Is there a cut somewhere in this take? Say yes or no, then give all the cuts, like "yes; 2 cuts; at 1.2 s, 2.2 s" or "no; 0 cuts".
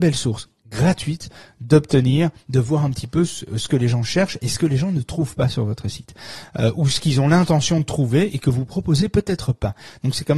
no; 0 cuts